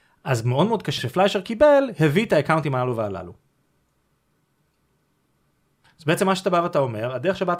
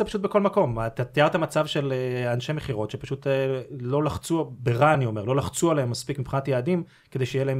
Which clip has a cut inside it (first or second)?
first